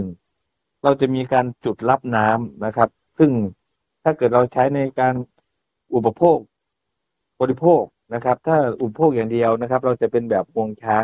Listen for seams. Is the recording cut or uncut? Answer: uncut